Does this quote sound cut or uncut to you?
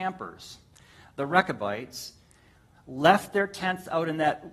uncut